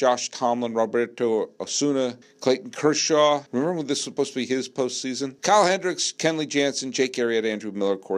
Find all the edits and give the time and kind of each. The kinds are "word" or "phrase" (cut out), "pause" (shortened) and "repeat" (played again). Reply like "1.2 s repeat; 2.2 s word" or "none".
2.2 s pause; 3.5 s pause; 5.4 s pause